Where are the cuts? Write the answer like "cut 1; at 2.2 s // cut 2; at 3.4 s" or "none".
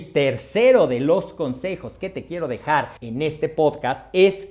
cut 1; at 3.0 s